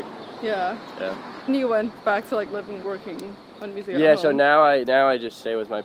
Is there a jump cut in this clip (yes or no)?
yes